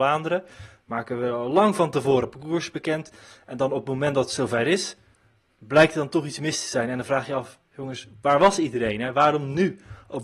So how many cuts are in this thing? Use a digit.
0